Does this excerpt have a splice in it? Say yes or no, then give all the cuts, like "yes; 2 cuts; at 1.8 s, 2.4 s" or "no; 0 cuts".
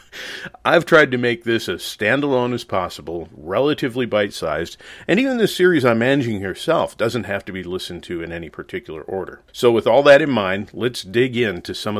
yes; 1 cut; at 9.5 s